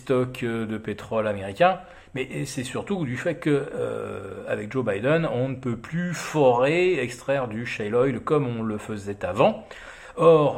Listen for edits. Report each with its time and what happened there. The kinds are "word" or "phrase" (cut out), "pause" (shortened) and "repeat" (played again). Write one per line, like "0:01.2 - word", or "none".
none